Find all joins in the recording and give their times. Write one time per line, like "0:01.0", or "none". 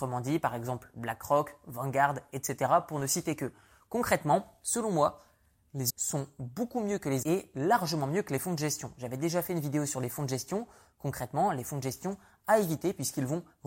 0:05.9
0:07.2